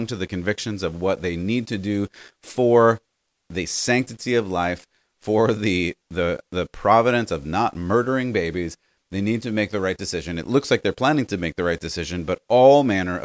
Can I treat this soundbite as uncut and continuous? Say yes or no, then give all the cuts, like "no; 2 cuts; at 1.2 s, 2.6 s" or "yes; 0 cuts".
yes; 0 cuts